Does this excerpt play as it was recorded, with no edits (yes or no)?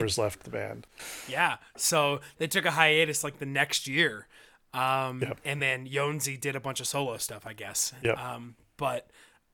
yes